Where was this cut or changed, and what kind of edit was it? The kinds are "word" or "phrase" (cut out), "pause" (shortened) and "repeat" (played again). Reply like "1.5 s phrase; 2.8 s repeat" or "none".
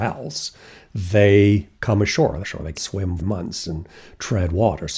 1.7 s pause; 2.4 s phrase; 2.7 s word; 3.2 s phrase